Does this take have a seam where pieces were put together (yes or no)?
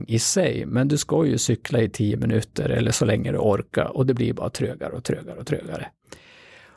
no